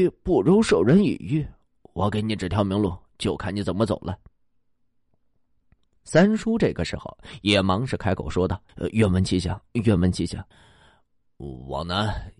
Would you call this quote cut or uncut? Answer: cut